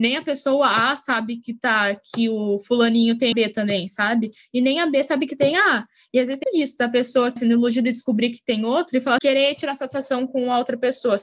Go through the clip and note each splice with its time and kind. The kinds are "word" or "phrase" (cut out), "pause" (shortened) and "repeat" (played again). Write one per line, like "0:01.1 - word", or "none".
0:03.3 - word
0:06.4 - word
0:07.4 - word
0:09.2 - word